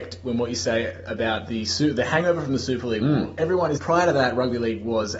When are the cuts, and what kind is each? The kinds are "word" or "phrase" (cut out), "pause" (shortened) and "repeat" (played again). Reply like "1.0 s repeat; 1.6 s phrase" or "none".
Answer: 3.8 s word